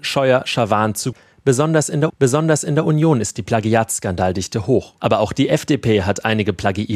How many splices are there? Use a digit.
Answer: 3